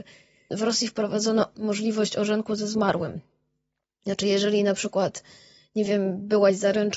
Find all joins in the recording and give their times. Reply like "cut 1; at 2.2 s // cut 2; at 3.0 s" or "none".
none